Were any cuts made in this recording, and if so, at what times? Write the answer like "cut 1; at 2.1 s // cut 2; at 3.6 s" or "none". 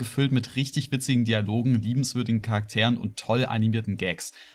none